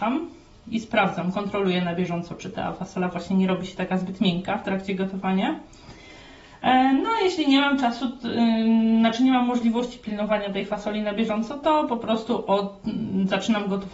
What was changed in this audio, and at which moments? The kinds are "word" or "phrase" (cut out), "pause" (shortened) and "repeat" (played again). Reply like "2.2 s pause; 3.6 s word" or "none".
none

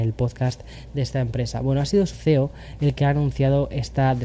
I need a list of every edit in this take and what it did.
2.1 s word

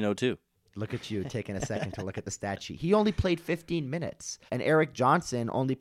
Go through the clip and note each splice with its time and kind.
4.5 s pause

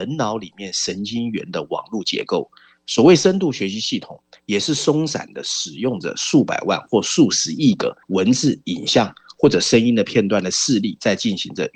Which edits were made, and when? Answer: 8.0 s pause

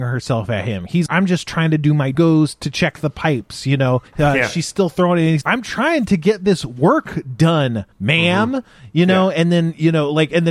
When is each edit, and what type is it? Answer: 1.1 s word; 2.1 s phrase; 4.1 s pause; 5.4 s word; 7.9 s pause

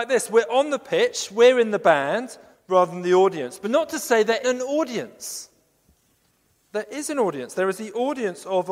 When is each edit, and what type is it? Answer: 2.5 s pause; 3.6 s word; 4.4 s word

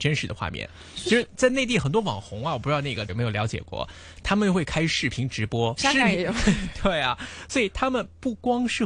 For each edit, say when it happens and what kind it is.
3.1 s word; 5.8 s phrase

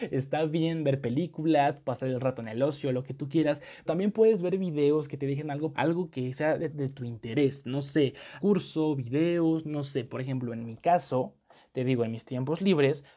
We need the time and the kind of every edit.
3.9 s word; 5.7 s word; 6.7 s word; 8.4 s word

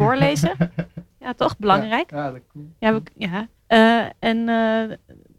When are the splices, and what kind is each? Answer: 1.1 s pause; 3.6 s pause

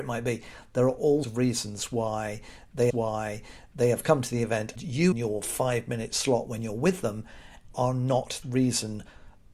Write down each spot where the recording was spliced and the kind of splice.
1.2 s word; 2.9 s repeat; 4.8 s word; 5.1 s phrase; 7.7 s word; 8.4 s word

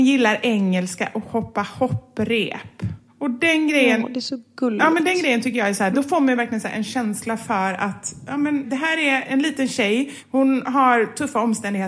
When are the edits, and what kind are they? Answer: none

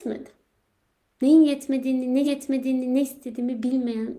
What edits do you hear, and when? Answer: 2.2 s repeat

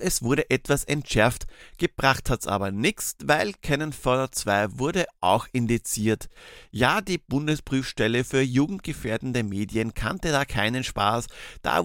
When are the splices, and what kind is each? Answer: none

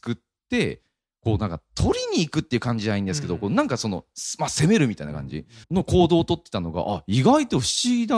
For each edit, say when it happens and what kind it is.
5.6 s pause

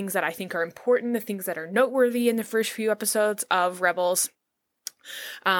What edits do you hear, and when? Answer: none

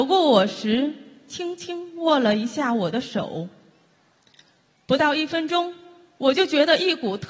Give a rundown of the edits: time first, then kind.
none

